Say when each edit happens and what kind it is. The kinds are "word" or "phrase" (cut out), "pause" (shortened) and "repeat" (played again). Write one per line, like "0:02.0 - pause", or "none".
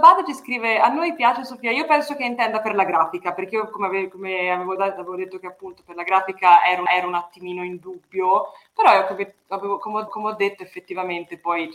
0:06.9 - repeat
0:10.1 - repeat